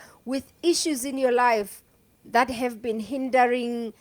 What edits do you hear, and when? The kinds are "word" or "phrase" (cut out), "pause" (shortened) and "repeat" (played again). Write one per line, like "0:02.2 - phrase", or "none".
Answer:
0:02.0 - pause